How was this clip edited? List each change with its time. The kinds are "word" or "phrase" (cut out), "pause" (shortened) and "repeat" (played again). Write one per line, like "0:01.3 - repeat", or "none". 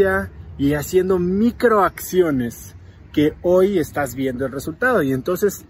none